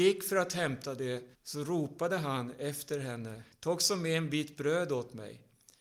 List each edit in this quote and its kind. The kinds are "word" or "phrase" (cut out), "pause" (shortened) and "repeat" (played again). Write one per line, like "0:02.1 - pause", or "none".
0:01.3 - pause
0:03.5 - pause